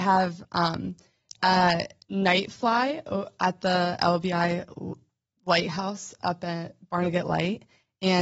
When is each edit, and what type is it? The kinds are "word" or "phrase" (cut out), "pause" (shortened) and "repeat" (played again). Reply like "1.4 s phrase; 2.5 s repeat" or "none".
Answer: none